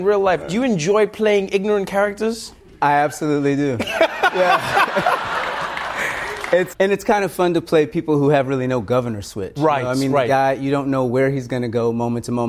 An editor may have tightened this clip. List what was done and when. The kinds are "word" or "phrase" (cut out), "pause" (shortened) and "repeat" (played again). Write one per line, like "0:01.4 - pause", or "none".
0:06.7 - word